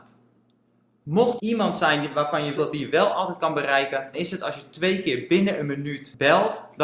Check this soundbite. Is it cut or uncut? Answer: cut